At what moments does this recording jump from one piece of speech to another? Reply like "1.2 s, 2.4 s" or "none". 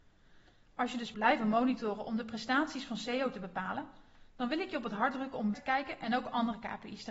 1.1 s, 5.5 s